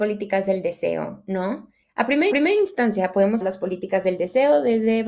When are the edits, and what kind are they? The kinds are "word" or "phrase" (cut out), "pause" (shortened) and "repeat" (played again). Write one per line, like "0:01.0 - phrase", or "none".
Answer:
0:01.8 - pause
0:02.3 - repeat
0:03.4 - word